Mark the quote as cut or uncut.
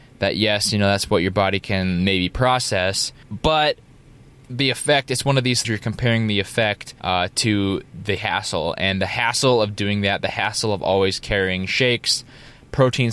cut